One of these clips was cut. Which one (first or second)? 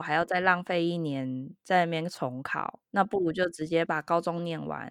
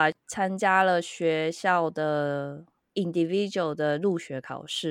first